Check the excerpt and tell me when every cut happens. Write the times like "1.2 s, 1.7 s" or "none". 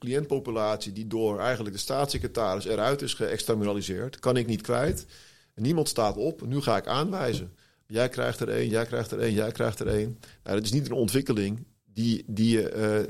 none